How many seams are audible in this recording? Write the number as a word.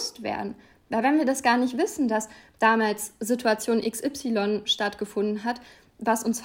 zero